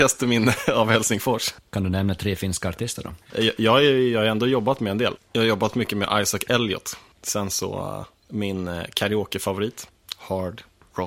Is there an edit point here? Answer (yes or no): no